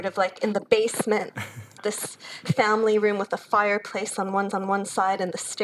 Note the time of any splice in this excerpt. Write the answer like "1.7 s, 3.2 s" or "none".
1.8 s, 2.4 s, 4.5 s